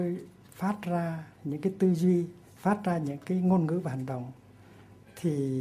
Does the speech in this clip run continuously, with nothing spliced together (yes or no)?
no